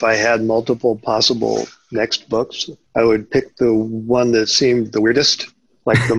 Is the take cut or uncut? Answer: cut